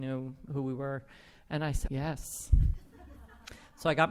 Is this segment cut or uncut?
cut